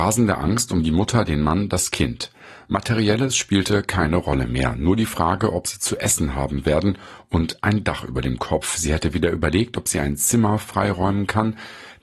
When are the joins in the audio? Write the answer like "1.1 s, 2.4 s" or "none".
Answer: none

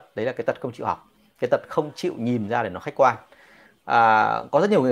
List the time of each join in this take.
none

